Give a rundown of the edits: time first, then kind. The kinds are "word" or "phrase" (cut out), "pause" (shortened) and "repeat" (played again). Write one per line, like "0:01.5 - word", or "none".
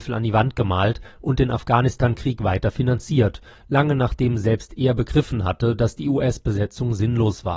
none